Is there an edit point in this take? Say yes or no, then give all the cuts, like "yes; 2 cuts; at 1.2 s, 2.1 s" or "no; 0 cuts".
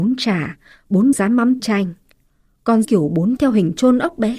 yes; 4 cuts; at 1.1 s, 1.6 s, 2.8 s, 3.4 s